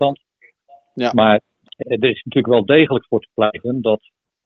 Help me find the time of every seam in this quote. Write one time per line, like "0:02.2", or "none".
0:01.8